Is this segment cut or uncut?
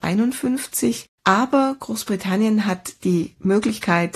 cut